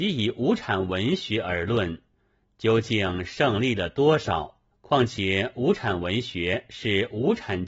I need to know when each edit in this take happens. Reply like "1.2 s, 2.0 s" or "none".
4.7 s